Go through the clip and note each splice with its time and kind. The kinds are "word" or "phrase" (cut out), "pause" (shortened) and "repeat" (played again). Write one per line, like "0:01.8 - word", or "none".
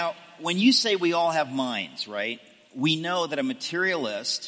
none